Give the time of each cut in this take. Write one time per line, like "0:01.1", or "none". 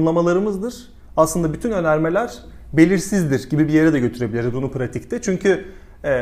none